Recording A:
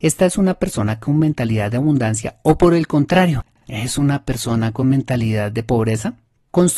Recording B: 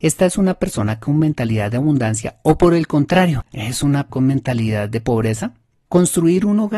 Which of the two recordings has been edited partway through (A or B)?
B